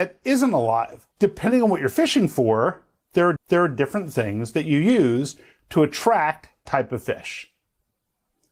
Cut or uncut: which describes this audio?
cut